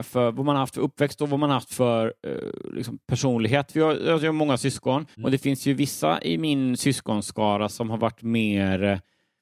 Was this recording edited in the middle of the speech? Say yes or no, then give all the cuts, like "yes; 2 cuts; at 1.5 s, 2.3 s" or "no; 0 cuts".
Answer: yes; 1 cut; at 5.1 s